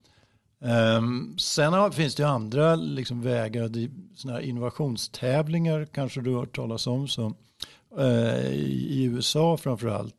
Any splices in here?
no; 0 cuts

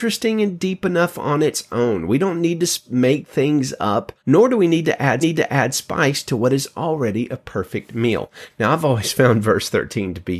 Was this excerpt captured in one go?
no; 2 cuts; at 4.2 s, 5.2 s

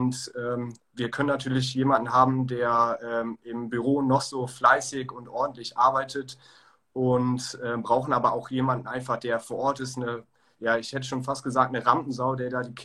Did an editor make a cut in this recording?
no; 0 cuts

